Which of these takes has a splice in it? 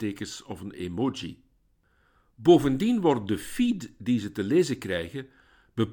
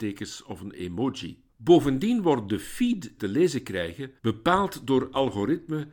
second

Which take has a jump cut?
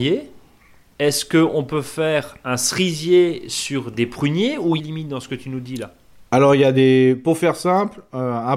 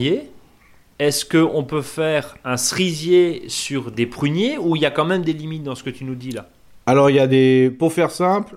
first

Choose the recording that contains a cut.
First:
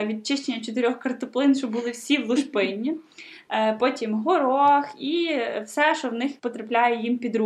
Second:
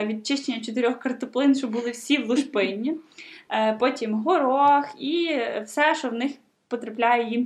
first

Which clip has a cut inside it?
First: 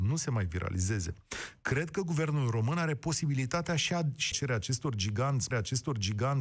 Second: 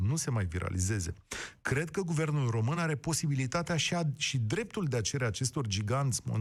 first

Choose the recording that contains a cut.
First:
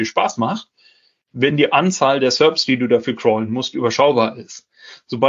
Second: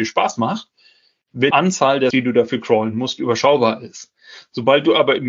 second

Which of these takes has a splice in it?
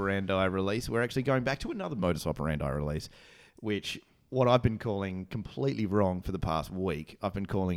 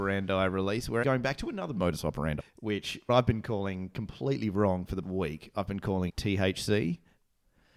second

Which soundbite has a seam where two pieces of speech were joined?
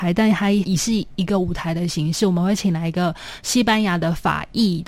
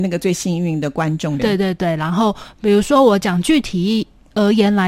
second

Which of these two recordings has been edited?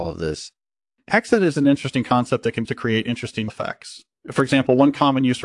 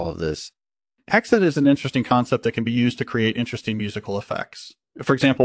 first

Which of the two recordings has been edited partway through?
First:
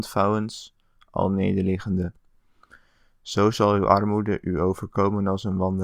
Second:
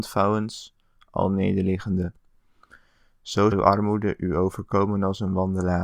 second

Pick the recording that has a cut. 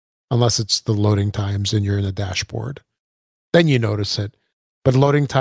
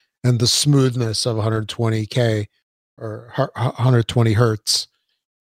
second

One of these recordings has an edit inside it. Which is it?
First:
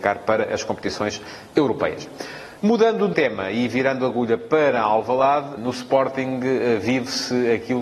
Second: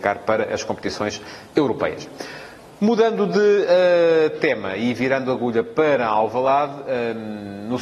first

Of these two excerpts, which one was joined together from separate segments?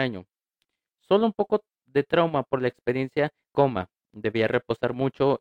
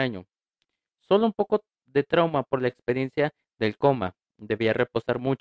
first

